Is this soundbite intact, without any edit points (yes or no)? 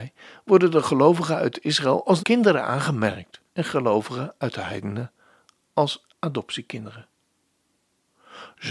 no